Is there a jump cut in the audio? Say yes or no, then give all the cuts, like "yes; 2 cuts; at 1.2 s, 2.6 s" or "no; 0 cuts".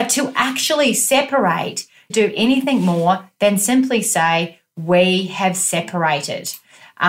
yes; 1 cut; at 2.1 s